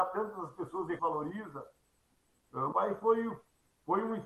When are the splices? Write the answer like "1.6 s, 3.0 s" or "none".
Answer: 1.0 s, 2.7 s